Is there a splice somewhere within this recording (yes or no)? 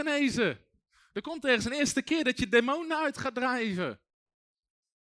no